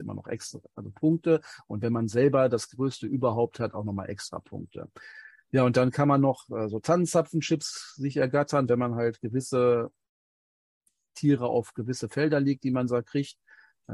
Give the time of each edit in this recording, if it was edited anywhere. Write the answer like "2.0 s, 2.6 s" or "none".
none